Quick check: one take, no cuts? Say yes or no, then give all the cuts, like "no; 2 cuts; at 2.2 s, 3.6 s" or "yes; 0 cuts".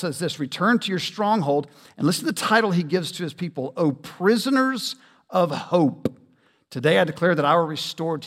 yes; 0 cuts